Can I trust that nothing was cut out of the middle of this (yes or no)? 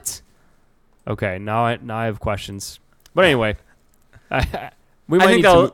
yes